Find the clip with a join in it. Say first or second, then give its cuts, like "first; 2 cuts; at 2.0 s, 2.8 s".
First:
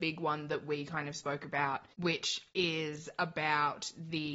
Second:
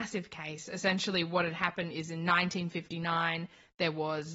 first; 1 cut; at 1.9 s